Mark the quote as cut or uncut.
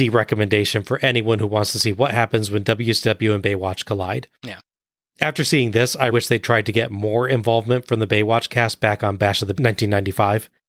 cut